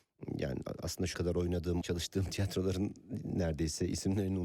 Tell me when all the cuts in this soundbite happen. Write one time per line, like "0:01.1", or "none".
0:01.1
0:01.8

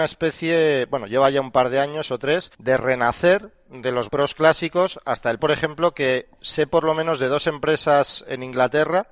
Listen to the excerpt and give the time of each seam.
0:02.5
0:04.1
0:05.4

